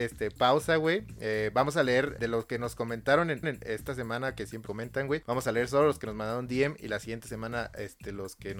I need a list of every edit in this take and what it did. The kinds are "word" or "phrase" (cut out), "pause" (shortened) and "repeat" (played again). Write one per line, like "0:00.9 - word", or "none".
0:02.2 - word
0:03.4 - repeat
0:04.7 - word